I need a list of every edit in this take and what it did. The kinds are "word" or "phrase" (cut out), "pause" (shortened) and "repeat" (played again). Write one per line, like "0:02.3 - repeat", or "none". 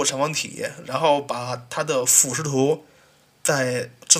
none